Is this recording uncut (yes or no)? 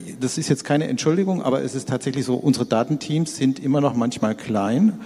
yes